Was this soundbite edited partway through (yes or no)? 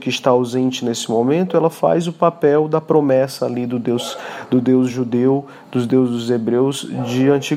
no